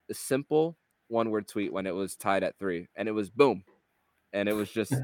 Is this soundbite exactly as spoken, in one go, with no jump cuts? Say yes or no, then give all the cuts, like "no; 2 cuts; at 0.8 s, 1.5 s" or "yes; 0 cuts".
yes; 0 cuts